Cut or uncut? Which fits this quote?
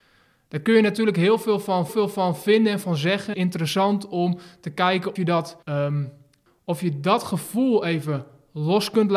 cut